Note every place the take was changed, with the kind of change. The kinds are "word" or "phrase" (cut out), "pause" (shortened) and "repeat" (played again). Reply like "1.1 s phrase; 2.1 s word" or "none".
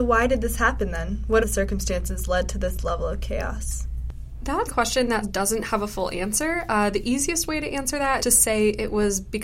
1.4 s word; 4.7 s word; 5.2 s word; 8.2 s word